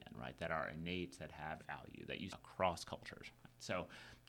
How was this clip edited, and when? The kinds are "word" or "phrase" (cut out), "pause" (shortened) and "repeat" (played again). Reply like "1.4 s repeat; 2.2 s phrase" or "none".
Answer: 1.6 s word; 2.3 s word